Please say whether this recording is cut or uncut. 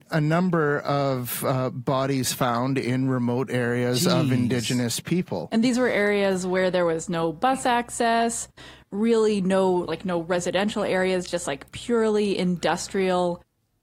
uncut